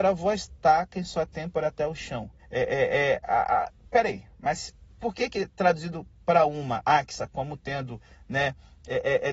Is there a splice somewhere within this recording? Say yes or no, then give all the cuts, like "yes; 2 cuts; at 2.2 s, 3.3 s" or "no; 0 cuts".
yes; 1 cut; at 2.4 s